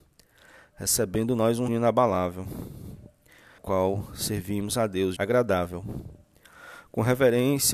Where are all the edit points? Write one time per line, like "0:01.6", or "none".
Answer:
0:01.7
0:03.6
0:05.2